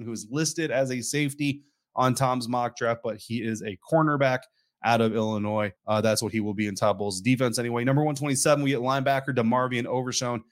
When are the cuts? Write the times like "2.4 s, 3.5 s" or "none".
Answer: 5.8 s